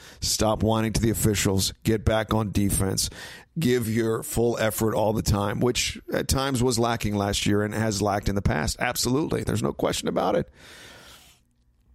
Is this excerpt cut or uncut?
uncut